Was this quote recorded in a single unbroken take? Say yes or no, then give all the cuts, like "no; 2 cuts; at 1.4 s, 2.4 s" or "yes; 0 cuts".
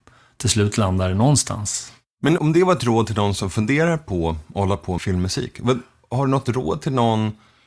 no; 2 cuts; at 2.4 s, 5.0 s